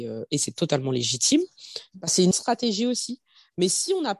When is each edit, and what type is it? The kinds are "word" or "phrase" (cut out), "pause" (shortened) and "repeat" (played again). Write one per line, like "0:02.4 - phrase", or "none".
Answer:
0:02.3 - word